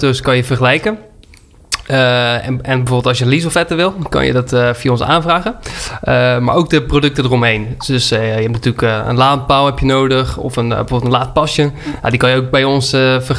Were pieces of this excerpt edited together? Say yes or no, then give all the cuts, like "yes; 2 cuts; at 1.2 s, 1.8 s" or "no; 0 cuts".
no; 0 cuts